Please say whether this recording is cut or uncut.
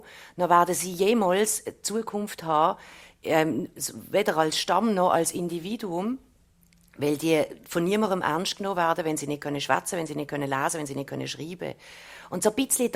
uncut